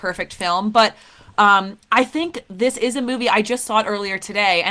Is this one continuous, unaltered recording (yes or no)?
yes